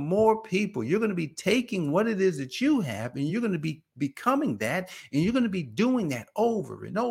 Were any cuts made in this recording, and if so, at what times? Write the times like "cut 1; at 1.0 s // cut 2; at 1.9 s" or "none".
none